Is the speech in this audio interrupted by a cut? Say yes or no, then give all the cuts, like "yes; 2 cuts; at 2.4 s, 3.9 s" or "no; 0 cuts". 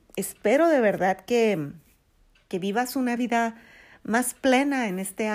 no; 0 cuts